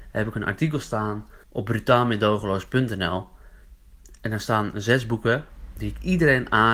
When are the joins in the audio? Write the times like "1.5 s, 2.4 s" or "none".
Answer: 1.4 s